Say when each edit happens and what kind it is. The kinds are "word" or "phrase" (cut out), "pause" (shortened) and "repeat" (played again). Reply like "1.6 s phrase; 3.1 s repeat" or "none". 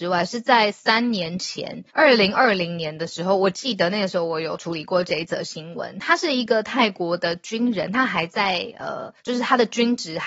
1.9 s pause; 9.2 s pause